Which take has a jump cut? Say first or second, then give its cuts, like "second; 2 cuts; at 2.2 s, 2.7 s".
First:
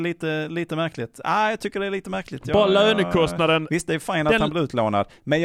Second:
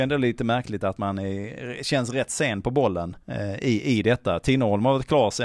second; 1 cut; at 3.2 s